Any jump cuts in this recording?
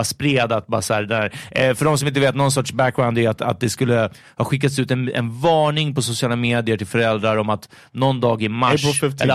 no; 0 cuts

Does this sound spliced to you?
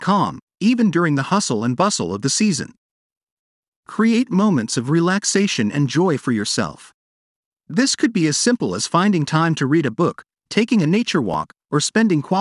no; 0 cuts

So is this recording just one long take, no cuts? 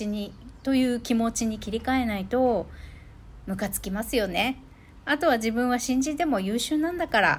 yes; 0 cuts

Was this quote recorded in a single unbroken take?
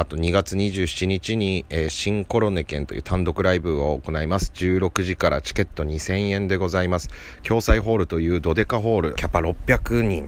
no; 1 cut; at 9.2 s

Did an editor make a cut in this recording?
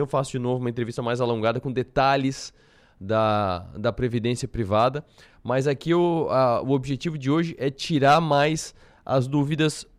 no; 0 cuts

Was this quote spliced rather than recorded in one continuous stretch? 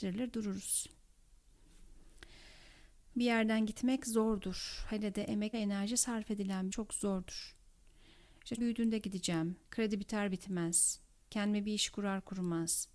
yes; 5 cuts; at 3.1 s, 5.5 s, 6.7 s, 8.6 s, 9.6 s

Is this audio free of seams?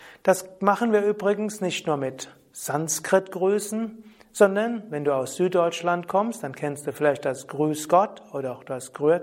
yes; 0 cuts

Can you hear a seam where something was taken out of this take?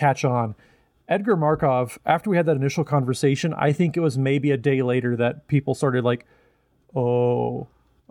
no; 0 cuts

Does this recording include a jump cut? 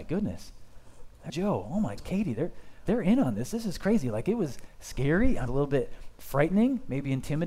yes; 4 cuts; at 1.3 s, 2.0 s, 2.9 s, 5.5 s

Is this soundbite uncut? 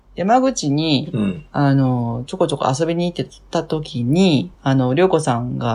no; 1 cut; at 4.5 s

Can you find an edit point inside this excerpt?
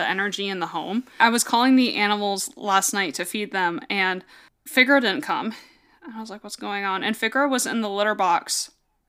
no; 0 cuts

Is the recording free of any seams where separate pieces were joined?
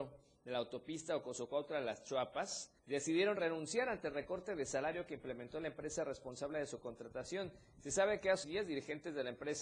no; 2 cuts; at 2.8 s, 8.4 s

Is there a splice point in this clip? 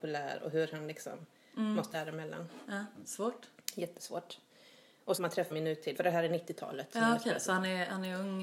yes; 4 cuts; at 1.9 s, 5.1 s, 5.5 s, 5.9 s

